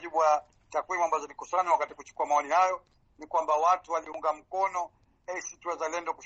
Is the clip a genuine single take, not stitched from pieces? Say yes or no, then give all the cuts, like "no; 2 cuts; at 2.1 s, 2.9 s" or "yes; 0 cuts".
yes; 0 cuts